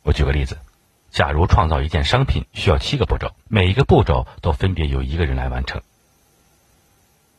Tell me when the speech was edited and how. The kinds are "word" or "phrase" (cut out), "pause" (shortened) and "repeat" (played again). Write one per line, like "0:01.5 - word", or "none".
0:03.4 - pause